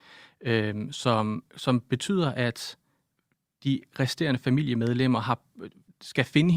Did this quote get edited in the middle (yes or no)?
no